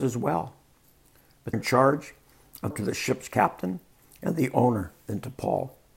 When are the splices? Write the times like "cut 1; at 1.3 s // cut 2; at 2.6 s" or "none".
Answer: cut 1; at 1.5 s // cut 2; at 2.7 s